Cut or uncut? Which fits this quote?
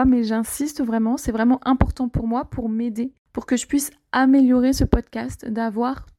cut